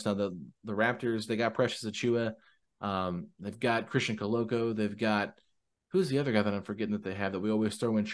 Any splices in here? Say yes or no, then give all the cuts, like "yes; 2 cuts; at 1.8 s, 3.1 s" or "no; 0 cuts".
no; 0 cuts